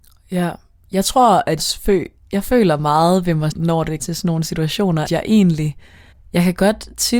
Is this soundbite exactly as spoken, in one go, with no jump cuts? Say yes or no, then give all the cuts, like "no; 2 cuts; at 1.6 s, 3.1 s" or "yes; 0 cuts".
no; 5 cuts; at 1.6 s, 3.5 s, 4.0 s, 5.1 s, 6.1 s